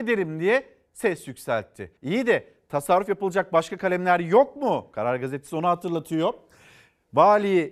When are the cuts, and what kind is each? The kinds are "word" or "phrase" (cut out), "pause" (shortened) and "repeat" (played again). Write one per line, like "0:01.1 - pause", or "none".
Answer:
0:02.0 - pause